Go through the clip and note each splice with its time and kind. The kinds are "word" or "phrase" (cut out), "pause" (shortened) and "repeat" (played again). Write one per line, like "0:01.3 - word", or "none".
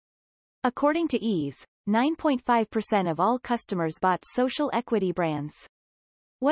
none